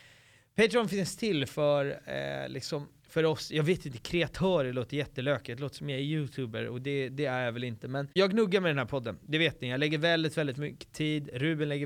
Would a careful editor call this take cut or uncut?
cut